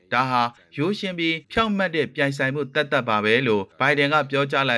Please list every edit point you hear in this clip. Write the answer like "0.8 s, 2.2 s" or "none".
1.4 s, 3.7 s